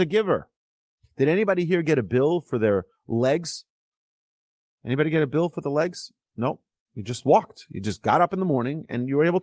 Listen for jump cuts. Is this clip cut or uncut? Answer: uncut